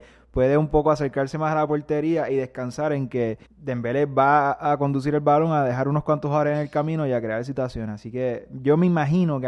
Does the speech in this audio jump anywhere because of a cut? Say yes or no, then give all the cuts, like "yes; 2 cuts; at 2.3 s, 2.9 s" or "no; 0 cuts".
yes; 1 cut; at 3.4 s